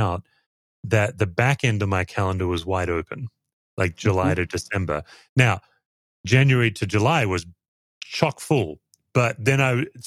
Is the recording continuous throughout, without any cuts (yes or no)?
yes